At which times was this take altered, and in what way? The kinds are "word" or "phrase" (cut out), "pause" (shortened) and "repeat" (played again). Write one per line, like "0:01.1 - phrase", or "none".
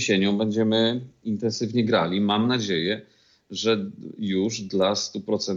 none